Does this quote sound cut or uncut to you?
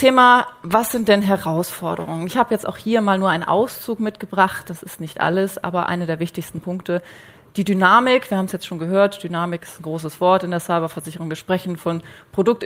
uncut